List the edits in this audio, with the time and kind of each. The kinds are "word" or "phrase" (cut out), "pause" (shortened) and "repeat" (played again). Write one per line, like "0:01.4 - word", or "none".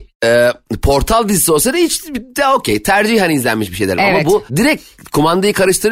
0:04.5 - pause